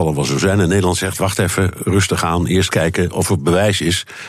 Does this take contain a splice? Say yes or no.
no